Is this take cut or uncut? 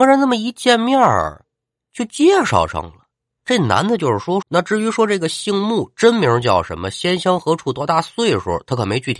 cut